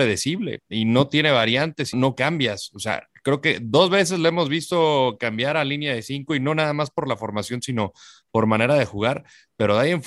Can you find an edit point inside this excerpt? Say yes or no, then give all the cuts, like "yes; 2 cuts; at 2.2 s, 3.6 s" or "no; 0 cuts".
yes; 1 cut; at 1.9 s